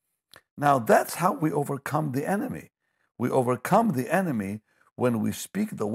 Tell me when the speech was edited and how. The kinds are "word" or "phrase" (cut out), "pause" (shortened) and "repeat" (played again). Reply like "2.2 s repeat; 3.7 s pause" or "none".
none